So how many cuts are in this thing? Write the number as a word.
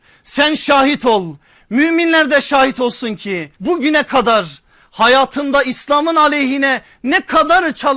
one